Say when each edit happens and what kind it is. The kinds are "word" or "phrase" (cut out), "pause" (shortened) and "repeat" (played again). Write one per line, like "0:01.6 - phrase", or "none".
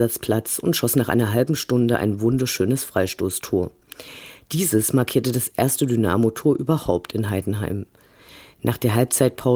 none